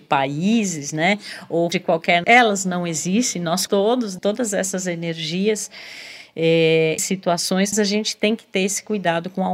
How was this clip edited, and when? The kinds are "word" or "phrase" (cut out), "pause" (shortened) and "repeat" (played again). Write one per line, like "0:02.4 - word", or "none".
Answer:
0:01.7 - word
0:02.2 - word
0:03.7 - word
0:04.2 - word
0:07.0 - word
0:07.7 - word